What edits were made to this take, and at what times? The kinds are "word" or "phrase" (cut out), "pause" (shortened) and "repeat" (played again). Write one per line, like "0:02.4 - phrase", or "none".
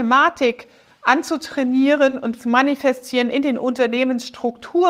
0:02.4 - word